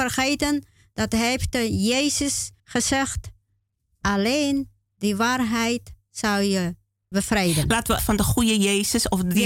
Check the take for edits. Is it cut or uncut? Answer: cut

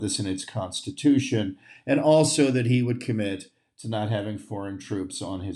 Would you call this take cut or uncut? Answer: uncut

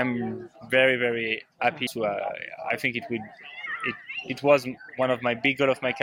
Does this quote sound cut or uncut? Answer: cut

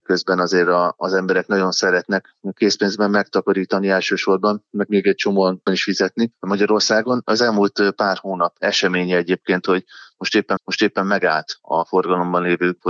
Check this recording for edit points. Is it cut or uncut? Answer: cut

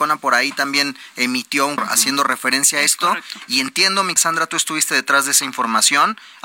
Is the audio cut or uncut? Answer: cut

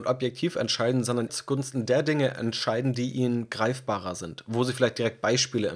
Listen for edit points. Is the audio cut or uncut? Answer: cut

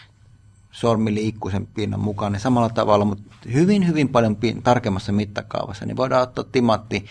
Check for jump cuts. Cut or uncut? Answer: uncut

